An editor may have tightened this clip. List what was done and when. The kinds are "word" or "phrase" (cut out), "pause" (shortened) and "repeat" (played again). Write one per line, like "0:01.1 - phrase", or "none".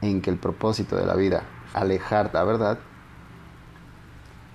0:01.7 - word
0:02.3 - word